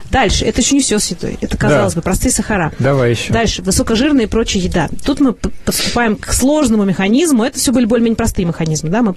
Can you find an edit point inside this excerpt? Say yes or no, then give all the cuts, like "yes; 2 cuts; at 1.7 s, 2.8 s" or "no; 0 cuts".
no; 0 cuts